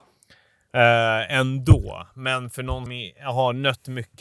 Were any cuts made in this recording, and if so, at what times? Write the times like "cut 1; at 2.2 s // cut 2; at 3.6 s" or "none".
cut 1; at 1.3 s // cut 2; at 2.9 s